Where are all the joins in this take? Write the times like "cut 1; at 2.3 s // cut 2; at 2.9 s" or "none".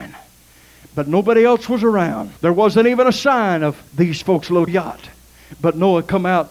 cut 1; at 2.4 s // cut 2; at 3.9 s // cut 3; at 4.7 s

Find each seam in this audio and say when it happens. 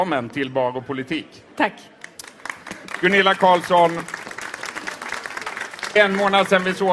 cut 1; at 1.5 s // cut 2; at 6.0 s

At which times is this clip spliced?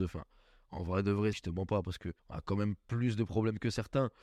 cut 1; at 1.3 s // cut 2; at 2.2 s

